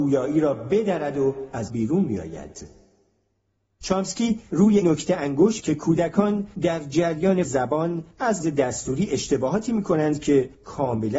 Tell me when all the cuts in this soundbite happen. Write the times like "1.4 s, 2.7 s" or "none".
1.7 s, 4.8 s, 5.6 s, 7.4 s, 8.4 s